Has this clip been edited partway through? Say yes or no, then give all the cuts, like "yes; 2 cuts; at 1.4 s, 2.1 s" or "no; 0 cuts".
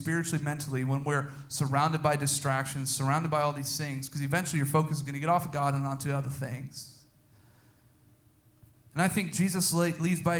no; 0 cuts